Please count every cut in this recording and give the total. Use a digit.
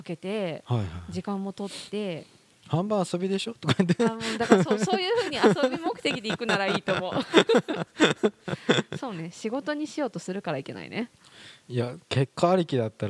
1